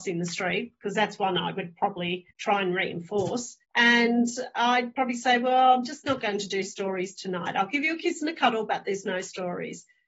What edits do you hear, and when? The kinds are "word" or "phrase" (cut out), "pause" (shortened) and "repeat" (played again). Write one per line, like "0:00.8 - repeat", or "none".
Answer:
0:02.3 - pause
0:03.6 - pause